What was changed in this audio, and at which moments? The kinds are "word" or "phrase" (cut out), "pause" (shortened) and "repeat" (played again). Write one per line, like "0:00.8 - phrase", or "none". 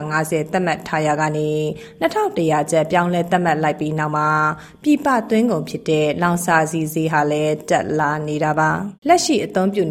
0:09.0 - pause